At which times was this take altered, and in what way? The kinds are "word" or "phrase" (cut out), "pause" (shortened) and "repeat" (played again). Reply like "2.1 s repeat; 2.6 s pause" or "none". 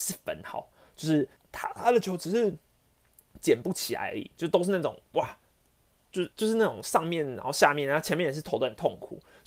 1.4 s pause; 6.3 s pause